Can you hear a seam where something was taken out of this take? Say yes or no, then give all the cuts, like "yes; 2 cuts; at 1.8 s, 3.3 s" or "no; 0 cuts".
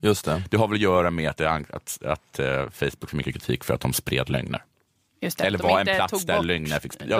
no; 0 cuts